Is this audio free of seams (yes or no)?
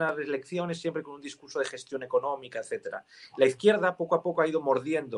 yes